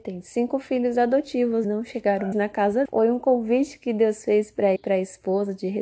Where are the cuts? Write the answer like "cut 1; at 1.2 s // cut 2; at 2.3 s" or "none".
cut 1; at 1.6 s // cut 2; at 2.3 s // cut 3; at 2.8 s // cut 4; at 4.8 s